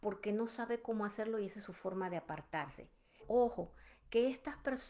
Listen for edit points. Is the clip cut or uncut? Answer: cut